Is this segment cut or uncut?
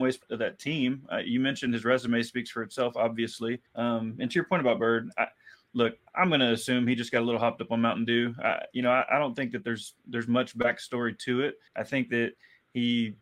cut